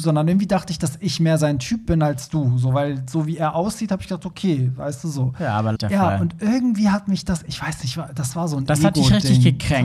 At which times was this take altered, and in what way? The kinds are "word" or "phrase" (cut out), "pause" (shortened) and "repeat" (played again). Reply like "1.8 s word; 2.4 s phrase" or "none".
5.8 s phrase